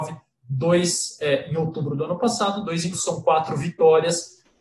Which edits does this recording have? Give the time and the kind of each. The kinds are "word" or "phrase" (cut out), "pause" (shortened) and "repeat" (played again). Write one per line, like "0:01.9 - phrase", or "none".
0:02.9 - word